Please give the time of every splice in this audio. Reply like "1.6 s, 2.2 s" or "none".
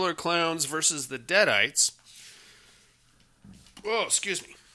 none